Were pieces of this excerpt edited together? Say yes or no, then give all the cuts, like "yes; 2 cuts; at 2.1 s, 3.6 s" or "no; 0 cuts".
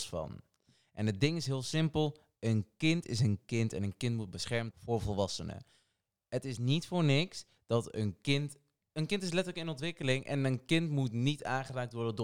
yes; 1 cut; at 4.7 s